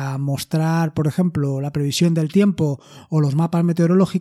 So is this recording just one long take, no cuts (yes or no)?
yes